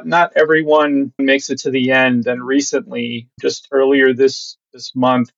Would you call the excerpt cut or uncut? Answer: cut